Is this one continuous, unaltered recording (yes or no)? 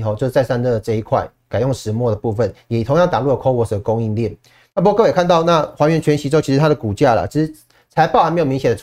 yes